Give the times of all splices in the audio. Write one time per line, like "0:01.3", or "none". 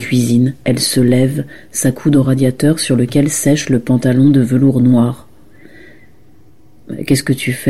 none